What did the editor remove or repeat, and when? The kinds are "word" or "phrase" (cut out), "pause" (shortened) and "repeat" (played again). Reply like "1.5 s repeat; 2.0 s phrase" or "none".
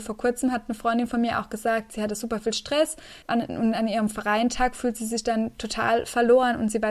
3.2 s pause